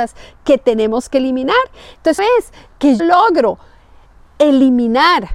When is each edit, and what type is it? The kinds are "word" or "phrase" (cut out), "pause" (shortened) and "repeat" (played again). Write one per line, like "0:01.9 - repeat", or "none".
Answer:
0:02.2 - word
0:03.0 - word